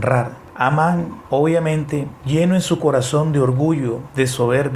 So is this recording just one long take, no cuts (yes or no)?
yes